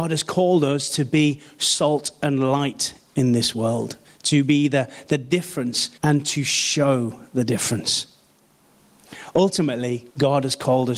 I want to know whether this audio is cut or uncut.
cut